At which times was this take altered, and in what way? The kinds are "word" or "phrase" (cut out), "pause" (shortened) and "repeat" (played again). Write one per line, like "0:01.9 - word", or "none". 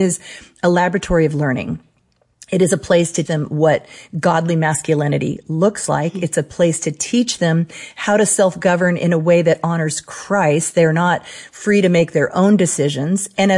0:03.3 - word